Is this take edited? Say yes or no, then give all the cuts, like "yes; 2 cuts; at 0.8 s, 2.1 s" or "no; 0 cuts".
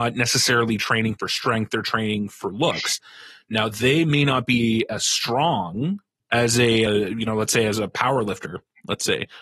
yes; 2 cuts; at 6.2 s, 6.9 s